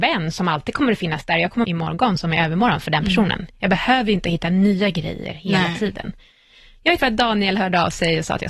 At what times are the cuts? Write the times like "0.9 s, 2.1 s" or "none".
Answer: 1.6 s, 7.0 s